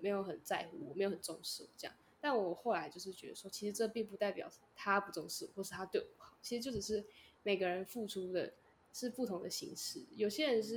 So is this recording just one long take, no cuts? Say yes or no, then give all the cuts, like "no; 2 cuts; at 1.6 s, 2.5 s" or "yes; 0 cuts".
yes; 0 cuts